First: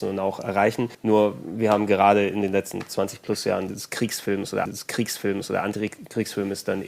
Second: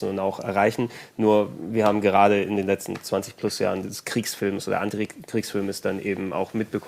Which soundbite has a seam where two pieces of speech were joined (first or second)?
first